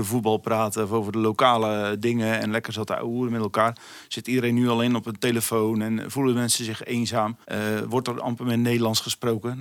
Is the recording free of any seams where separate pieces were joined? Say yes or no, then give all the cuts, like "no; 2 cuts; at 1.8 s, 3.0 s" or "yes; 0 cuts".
no; 1 cut; at 7.4 s